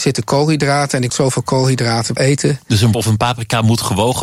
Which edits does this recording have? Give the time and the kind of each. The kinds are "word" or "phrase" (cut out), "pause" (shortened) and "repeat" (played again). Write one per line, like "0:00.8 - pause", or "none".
0:01.1 - word
0:02.2 - phrase
0:02.9 - word